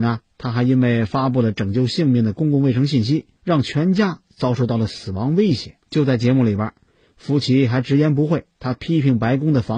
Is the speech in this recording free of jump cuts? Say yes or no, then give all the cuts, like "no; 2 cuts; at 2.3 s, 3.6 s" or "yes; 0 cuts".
no; 2 cuts; at 3.4 s, 5.8 s